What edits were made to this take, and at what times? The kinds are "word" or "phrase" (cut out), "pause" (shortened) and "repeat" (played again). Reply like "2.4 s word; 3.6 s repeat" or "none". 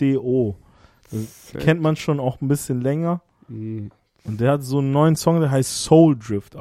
none